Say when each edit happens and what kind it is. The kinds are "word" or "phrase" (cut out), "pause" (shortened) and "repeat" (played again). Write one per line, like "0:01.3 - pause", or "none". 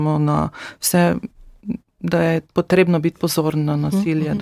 none